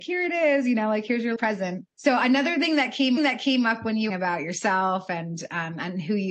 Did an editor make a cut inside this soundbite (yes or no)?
yes